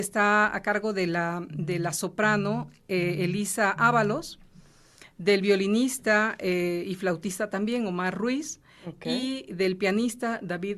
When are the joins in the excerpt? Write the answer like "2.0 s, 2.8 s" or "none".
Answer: none